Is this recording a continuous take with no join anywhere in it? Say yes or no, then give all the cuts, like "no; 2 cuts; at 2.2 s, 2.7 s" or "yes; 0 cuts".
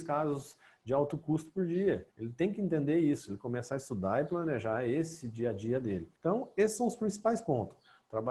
no; 2 cuts; at 2.1 s, 6.2 s